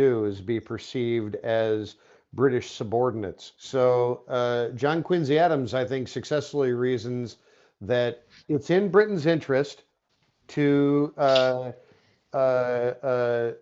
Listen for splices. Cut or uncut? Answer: cut